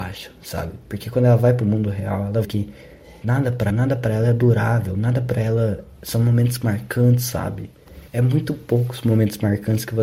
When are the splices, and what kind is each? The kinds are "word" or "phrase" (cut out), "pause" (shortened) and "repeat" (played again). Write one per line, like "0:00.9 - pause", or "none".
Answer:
0:02.4 - word
0:03.2 - word
0:03.7 - word
0:08.1 - pause

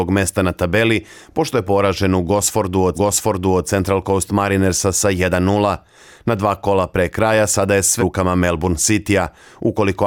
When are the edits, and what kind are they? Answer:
0:02.9 - repeat
0:08.0 - word

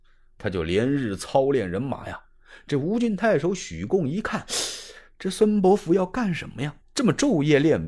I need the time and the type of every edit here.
0:06.8 - pause

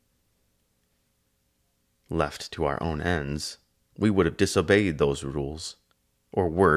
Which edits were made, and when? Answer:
none

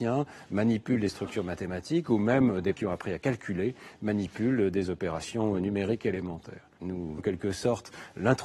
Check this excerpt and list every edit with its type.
0:02.7 - word
0:07.2 - word

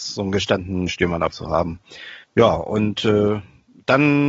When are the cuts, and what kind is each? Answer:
0:01.3 - word
0:02.2 - pause

